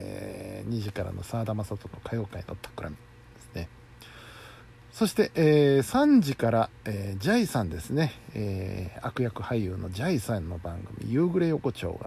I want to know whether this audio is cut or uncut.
uncut